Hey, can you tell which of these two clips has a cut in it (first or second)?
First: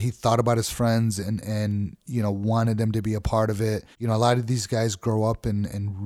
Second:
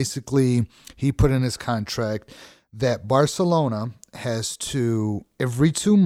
first